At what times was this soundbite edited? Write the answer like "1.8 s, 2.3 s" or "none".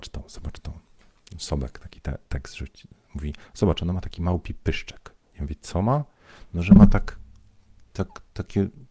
5.2 s